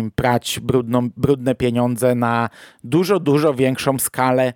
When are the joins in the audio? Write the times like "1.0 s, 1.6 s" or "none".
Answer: none